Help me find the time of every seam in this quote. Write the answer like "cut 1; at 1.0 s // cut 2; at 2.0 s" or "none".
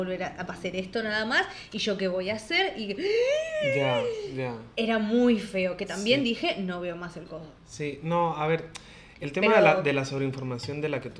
cut 1; at 7.6 s